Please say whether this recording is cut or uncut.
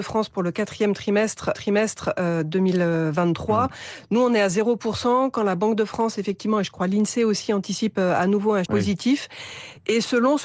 cut